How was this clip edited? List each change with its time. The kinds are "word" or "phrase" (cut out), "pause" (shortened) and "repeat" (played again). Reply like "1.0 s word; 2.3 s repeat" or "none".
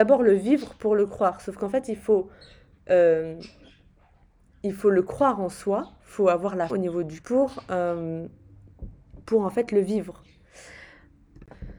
6.7 s word; 7.2 s word